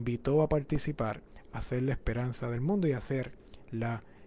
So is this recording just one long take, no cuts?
yes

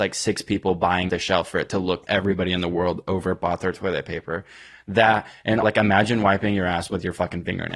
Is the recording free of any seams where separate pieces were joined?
no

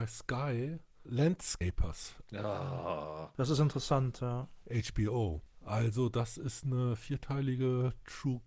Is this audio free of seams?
yes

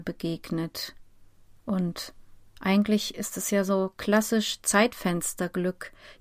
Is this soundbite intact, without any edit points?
yes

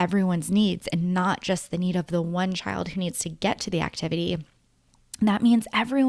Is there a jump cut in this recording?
no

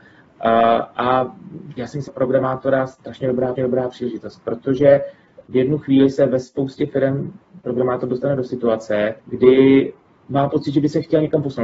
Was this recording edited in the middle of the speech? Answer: yes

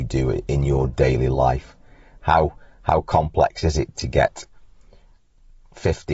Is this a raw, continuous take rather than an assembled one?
yes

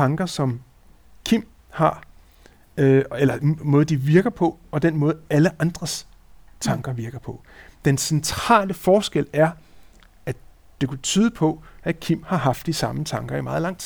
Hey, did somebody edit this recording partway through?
no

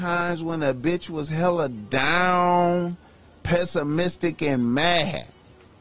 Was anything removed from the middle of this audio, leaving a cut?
no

